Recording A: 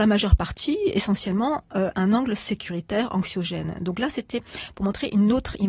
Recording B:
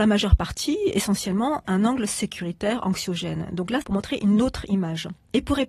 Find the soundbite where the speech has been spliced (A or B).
B